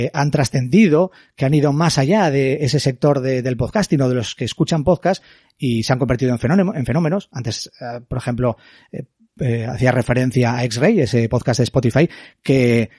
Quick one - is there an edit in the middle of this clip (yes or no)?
no